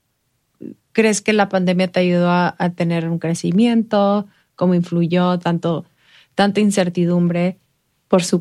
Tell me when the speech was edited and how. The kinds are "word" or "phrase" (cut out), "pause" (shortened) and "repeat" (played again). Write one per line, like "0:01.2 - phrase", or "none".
none